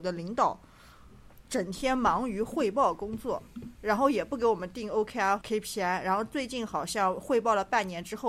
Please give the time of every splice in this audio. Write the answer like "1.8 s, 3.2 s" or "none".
5.4 s